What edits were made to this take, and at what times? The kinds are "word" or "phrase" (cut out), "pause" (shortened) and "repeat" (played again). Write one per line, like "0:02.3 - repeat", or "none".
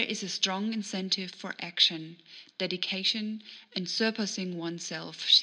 none